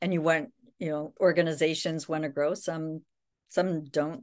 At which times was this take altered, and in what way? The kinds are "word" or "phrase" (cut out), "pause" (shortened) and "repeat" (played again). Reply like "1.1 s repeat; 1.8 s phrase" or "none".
1.2 s word